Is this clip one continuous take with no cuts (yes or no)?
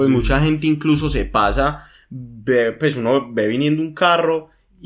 yes